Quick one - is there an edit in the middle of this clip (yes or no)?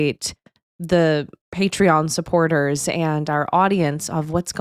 no